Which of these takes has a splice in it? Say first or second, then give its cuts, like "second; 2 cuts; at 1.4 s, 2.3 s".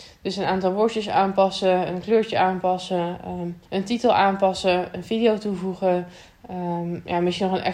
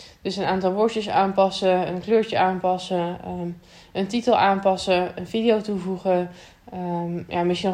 first; 1 cut; at 3.7 s